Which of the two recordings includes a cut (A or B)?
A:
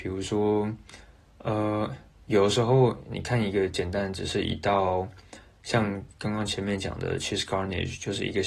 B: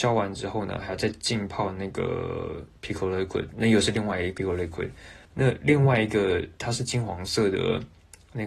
B